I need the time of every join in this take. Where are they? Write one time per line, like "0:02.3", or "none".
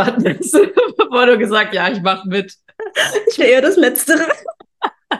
0:01.7
0:03.4